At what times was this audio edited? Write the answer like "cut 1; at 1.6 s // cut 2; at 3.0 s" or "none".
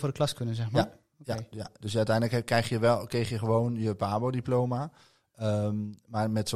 none